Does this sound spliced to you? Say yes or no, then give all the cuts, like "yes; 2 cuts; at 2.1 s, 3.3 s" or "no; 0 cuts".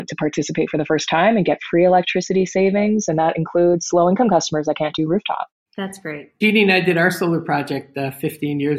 no; 0 cuts